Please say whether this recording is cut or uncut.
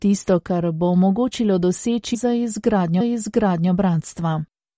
cut